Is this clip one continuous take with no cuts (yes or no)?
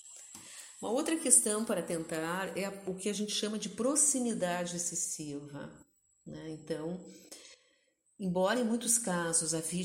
yes